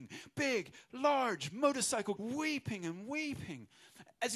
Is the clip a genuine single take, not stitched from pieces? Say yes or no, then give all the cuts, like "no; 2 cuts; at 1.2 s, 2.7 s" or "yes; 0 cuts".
no; 1 cut; at 2.2 s